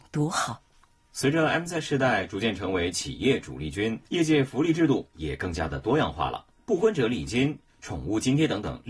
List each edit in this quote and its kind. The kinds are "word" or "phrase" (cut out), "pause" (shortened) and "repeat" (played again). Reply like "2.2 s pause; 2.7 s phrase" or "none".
4.1 s pause; 6.6 s pause